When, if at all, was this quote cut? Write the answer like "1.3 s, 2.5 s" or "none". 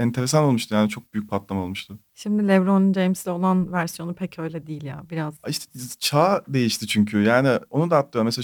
5.4 s

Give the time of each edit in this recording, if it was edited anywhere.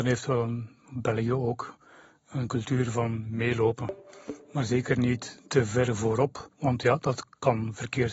6.5 s

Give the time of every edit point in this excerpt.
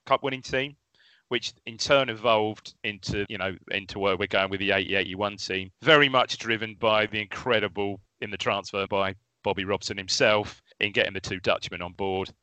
3.3 s, 5.7 s, 8.1 s, 8.9 s, 10.7 s

